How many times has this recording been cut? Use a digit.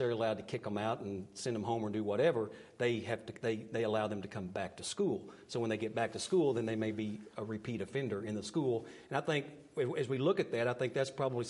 0